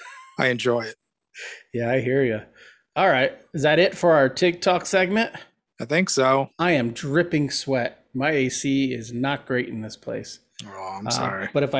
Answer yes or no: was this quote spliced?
no